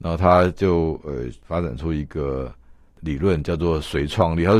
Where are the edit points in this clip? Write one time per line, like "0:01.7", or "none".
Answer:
none